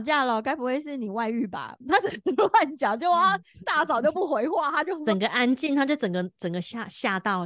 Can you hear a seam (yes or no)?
no